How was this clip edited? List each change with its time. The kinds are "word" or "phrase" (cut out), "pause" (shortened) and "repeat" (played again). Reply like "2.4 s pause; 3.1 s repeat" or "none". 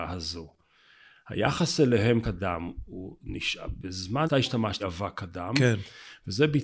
2.2 s word; 4.2 s word; 4.8 s word